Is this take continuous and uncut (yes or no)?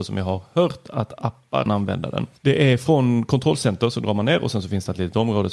no